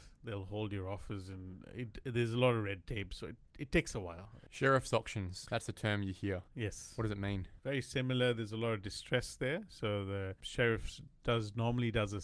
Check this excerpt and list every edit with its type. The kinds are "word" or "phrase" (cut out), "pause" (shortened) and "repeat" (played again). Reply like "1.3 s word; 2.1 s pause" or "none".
6.5 s pause